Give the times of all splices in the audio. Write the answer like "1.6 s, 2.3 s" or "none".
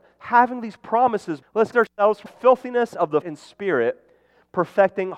1.4 s, 1.7 s, 2.3 s, 3.2 s